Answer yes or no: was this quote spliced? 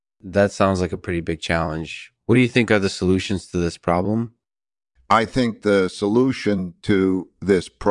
no